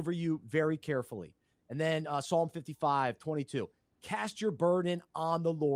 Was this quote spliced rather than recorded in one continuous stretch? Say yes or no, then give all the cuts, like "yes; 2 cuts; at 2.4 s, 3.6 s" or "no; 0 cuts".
no; 0 cuts